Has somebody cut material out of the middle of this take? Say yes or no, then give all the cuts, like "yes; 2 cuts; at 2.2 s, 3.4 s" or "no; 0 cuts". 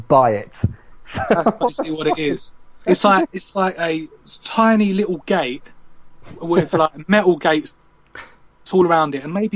yes; 1 cut; at 2.8 s